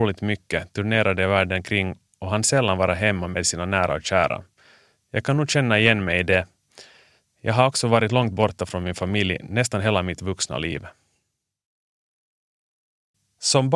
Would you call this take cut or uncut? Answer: uncut